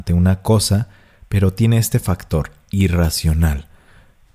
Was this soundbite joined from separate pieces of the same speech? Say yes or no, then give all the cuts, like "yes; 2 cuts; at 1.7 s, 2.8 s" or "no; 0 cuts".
no; 0 cuts